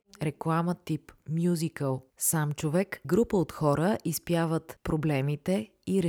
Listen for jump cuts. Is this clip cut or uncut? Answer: cut